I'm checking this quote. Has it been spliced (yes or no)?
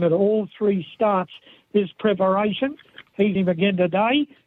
yes